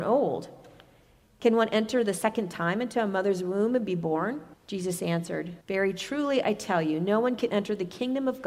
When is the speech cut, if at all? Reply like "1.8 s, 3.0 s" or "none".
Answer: 4.5 s, 5.6 s